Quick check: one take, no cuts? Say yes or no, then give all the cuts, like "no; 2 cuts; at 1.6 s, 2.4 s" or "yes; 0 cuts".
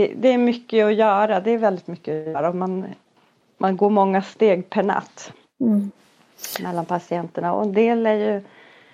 yes; 0 cuts